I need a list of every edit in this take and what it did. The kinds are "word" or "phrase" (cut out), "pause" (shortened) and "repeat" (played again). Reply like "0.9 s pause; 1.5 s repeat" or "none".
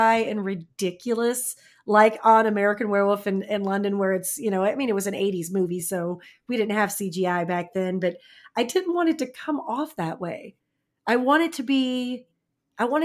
none